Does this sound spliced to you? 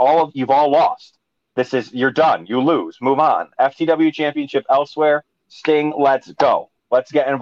no; 0 cuts

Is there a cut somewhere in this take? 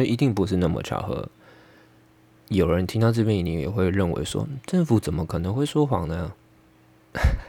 no; 0 cuts

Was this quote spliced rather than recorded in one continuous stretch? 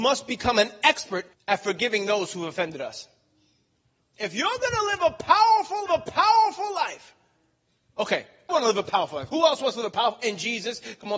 yes; 3 cuts; at 1.3 s, 5.9 s, 8.5 s

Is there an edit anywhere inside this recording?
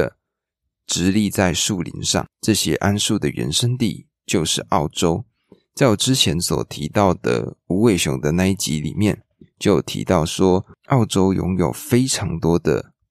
no; 0 cuts

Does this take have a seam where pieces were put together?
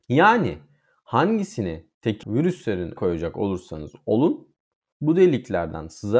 yes; 3 cuts; at 2.2 s, 3.0 s, 4.9 s

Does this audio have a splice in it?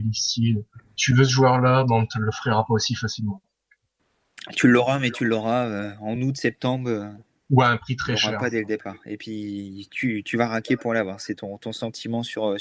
no; 0 cuts

